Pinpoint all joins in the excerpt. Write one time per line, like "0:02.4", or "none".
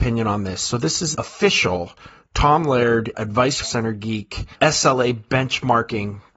0:01.1
0:03.1
0:03.6
0:04.5